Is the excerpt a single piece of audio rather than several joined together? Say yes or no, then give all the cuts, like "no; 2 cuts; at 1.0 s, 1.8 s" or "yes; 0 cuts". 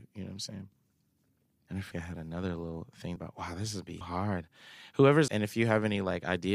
no; 4 cuts; at 1.9 s, 3.2 s, 4.0 s, 5.3 s